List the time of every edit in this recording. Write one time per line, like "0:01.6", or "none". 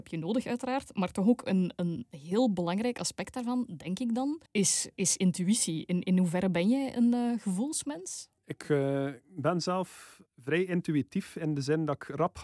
0:04.5
0:08.4
0:10.3